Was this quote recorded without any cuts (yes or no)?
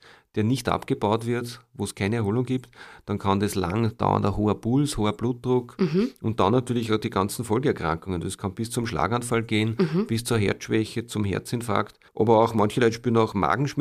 no